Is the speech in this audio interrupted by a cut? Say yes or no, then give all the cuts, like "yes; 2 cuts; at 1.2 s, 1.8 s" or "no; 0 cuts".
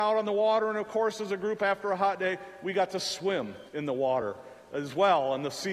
yes; 1 cut; at 3.7 s